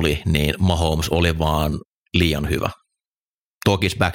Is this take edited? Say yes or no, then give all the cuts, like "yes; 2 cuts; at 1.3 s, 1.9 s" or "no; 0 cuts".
no; 0 cuts